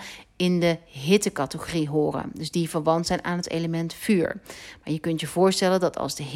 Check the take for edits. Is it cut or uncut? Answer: uncut